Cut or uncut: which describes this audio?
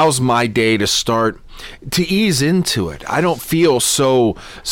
uncut